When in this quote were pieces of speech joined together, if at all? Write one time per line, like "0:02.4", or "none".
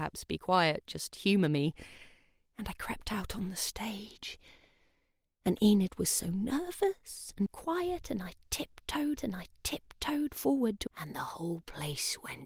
0:07.5
0:09.2
0:10.9